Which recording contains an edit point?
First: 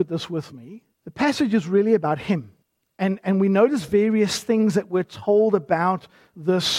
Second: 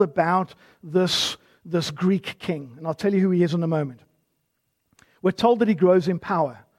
first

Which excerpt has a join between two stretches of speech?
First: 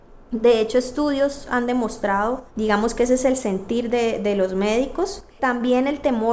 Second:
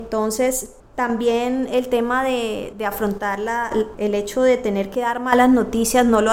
first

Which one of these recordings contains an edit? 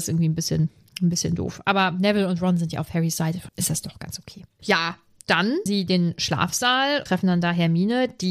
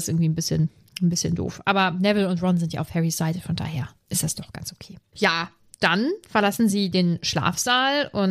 first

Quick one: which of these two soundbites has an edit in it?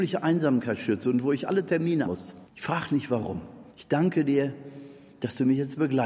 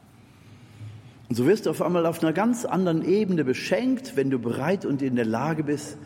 first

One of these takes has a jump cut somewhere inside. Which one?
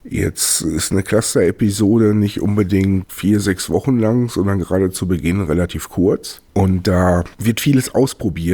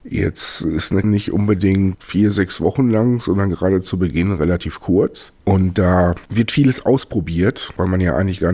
second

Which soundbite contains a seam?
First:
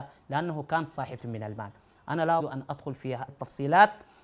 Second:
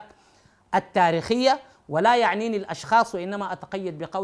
first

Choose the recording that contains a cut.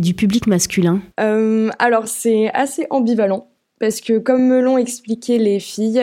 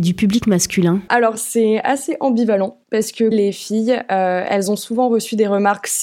second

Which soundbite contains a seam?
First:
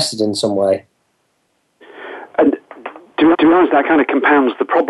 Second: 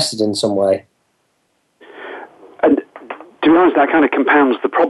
first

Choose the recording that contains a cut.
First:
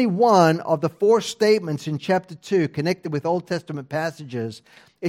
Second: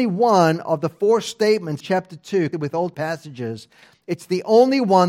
second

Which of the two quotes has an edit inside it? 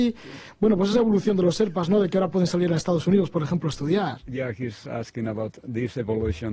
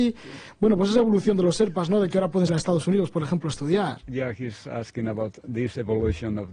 second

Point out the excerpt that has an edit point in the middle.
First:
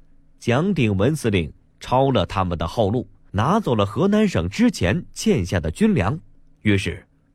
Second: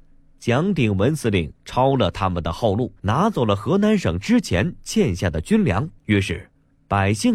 second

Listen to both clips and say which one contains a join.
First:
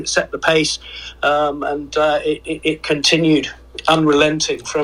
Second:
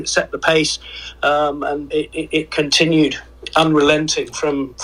second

